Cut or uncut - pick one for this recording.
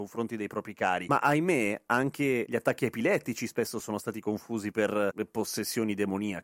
uncut